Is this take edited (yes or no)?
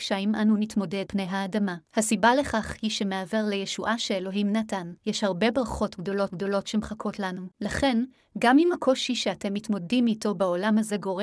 yes